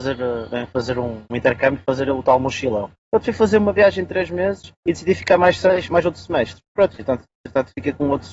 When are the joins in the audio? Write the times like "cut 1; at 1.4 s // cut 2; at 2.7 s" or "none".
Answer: cut 1; at 3.0 s // cut 2; at 4.8 s // cut 3; at 6.7 s